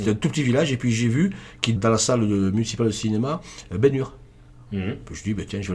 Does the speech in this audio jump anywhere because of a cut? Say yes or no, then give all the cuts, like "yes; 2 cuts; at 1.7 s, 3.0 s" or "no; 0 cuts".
yes; 1 cut; at 1.8 s